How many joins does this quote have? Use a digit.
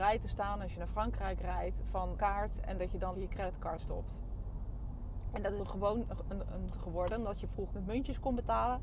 6